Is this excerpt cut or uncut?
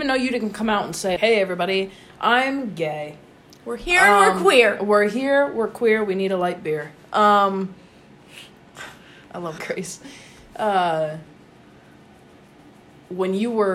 cut